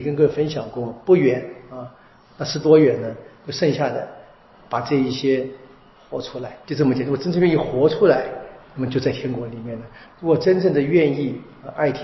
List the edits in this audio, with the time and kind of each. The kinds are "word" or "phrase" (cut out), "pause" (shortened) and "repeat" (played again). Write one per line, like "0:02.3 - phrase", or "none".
0:06.6 - pause